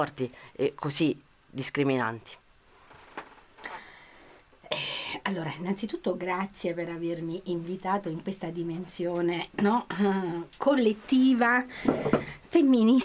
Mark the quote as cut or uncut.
uncut